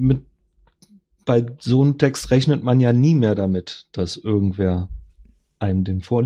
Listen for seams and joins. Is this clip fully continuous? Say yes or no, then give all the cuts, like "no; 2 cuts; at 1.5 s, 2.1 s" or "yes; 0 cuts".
yes; 0 cuts